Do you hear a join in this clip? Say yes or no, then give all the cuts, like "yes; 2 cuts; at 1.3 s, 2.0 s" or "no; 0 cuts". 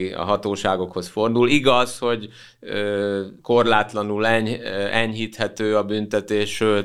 yes; 1 cut; at 3.4 s